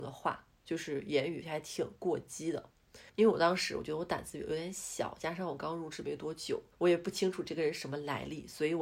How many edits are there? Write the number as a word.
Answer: two